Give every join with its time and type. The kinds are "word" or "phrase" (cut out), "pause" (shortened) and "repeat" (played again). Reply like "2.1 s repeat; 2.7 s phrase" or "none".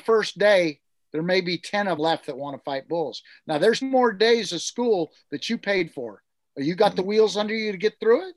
2.0 s word; 3.8 s word; 5.9 s word